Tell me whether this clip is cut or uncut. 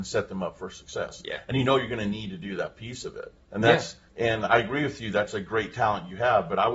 cut